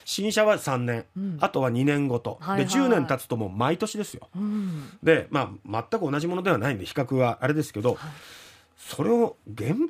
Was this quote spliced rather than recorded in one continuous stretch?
no; 0 cuts

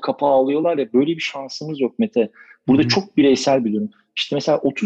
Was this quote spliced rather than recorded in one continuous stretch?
no; 0 cuts

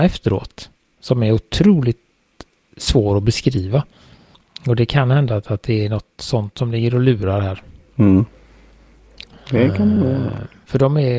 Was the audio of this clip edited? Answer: no; 0 cuts

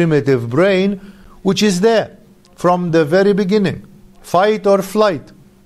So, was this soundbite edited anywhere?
no; 0 cuts

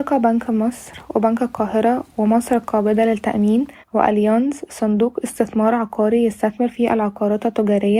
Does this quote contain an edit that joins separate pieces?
yes; 1 cut; at 3.8 s

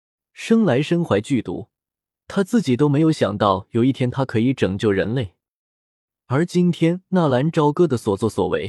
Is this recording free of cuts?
yes; 0 cuts

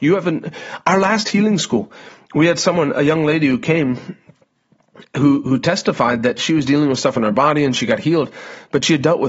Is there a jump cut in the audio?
no; 0 cuts

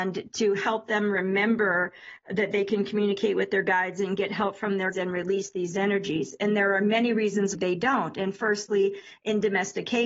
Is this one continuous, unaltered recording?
no; 2 cuts; at 4.9 s, 7.5 s

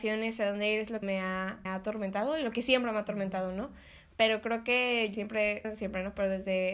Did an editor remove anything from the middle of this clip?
yes; 4 cuts; at 1.0 s, 1.7 s, 5.1 s, 5.6 s

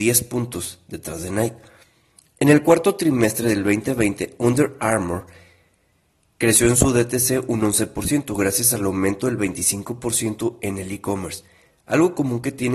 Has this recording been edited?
no; 0 cuts

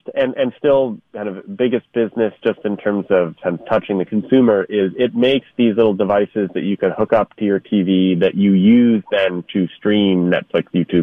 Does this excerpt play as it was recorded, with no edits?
yes; 0 cuts

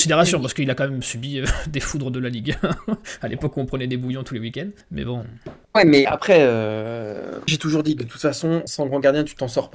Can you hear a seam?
yes; 5 cuts; at 4.8 s, 5.6 s, 6.0 s, 7.5 s, 8.7 s

